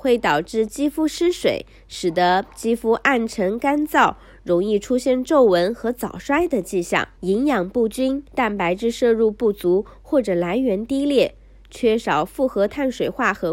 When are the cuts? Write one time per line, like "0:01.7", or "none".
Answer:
0:07.1
0:08.3

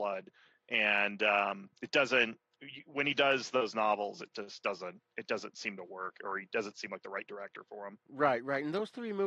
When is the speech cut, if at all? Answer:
0:05.1

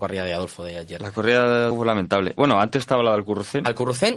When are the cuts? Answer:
0:01.7

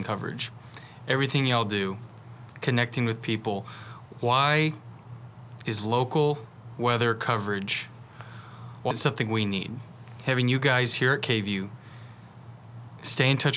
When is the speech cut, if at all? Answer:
0:08.9

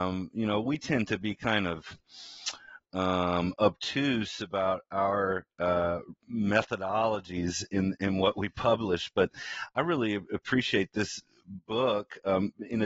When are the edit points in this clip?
none

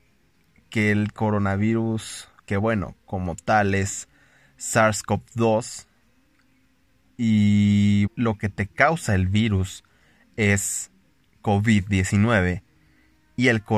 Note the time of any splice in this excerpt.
0:08.1

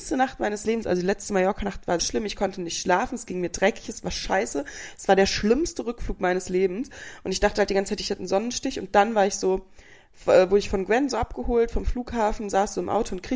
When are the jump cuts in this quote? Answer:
0:02.0

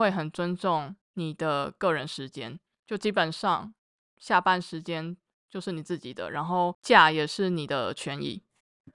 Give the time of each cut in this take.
none

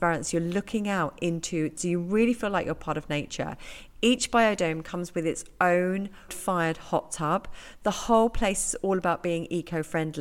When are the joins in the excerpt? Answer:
0:01.8
0:06.3

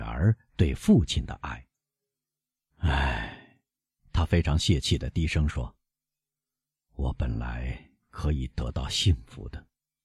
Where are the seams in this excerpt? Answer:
none

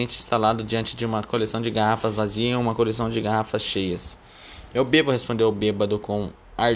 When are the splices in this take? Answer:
none

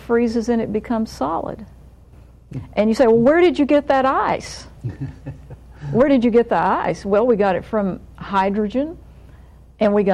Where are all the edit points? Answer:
0:04.8

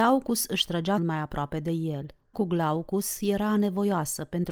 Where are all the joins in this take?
0:01.0
0:02.3

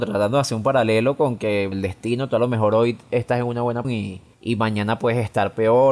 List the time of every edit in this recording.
0:01.7
0:03.8
0:04.3

